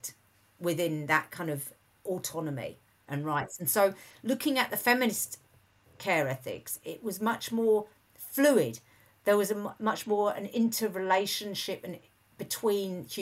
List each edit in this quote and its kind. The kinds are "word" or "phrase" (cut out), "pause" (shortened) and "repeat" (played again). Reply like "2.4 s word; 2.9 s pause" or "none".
none